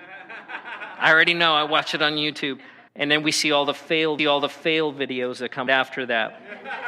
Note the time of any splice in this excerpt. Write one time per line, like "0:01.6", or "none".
0:02.9
0:04.2
0:05.7